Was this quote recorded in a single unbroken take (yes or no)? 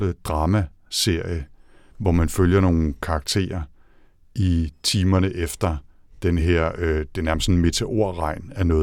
yes